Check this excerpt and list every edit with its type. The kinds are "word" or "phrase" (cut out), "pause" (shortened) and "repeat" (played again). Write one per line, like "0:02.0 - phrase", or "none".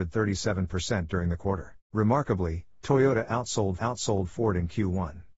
0:01.8 - pause
0:03.8 - repeat